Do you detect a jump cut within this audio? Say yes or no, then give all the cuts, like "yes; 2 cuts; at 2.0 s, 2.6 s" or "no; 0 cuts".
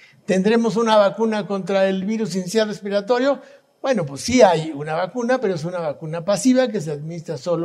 no; 0 cuts